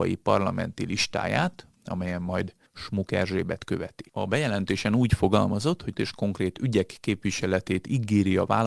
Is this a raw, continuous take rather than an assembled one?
no; 3 cuts; at 2.7 s, 4.1 s, 5.9 s

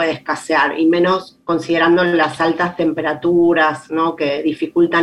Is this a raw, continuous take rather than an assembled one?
yes; 0 cuts

